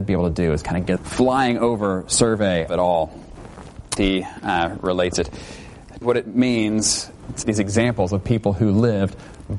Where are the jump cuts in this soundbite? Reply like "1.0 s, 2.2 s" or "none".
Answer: 1.0 s, 2.7 s, 4.0 s, 6.0 s, 7.4 s